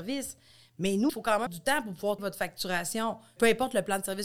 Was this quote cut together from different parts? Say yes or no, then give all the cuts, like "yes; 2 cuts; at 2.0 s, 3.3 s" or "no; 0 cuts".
yes; 3 cuts; at 1.1 s, 1.5 s, 2.2 s